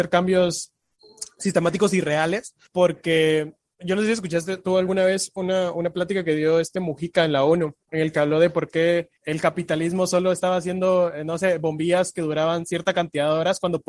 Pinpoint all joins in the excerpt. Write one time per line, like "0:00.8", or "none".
0:02.7
0:07.8
0:09.2